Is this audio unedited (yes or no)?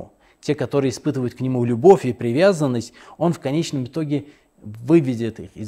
yes